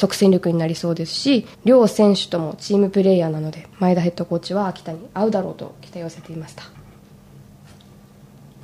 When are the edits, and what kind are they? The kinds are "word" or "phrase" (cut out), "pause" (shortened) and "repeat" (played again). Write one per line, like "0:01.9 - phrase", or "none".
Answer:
0:01.5 - pause
0:03.7 - pause